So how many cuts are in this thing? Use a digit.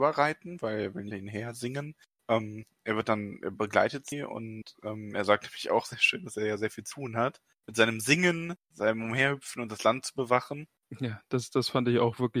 0